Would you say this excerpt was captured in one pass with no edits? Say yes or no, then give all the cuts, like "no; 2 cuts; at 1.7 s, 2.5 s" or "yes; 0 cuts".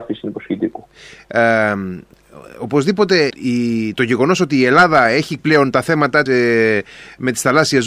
no; 3 cuts; at 3.3 s, 5.4 s, 6.3 s